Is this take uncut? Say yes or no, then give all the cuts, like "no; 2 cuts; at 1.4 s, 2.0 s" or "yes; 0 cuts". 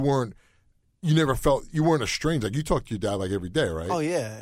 yes; 0 cuts